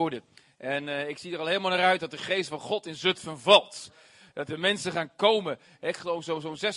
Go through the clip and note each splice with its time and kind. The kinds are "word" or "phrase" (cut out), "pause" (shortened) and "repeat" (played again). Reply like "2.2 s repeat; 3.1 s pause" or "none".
none